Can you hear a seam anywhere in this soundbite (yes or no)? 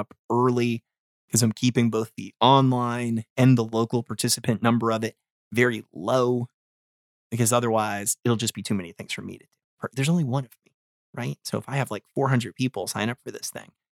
yes